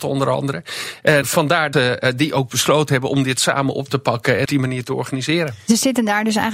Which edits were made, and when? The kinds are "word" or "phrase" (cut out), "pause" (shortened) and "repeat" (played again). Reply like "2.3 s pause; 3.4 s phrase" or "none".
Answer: 1.2 s word; 1.7 s word; 4.5 s phrase

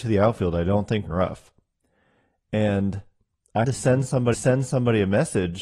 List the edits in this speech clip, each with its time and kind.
1.1 s phrase; 3.6 s word; 4.3 s repeat

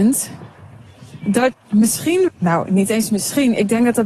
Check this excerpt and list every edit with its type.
1.5 s word; 2.3 s word

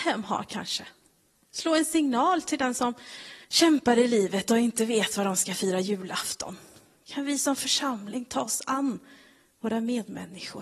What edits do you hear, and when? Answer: 1.3 s pause; 3.4 s pause

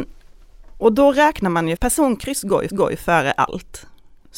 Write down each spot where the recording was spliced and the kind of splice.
1.8 s word; 2.7 s repeat

